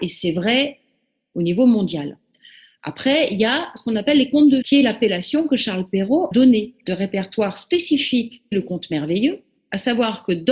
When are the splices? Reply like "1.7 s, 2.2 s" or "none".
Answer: 4.6 s, 6.3 s, 6.9 s, 8.5 s